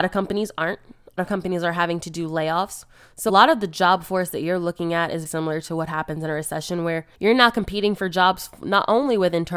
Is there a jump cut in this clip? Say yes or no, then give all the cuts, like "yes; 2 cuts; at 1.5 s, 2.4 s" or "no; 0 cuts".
yes; 4 cuts; at 1.2 s, 3.3 s, 5.3 s, 7.1 s